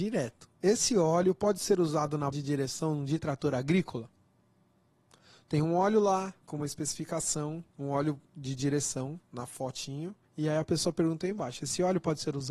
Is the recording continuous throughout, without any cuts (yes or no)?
no